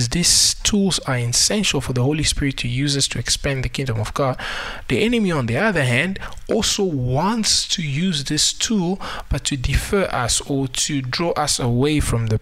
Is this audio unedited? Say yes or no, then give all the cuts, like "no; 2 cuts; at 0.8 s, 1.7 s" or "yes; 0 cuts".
yes; 0 cuts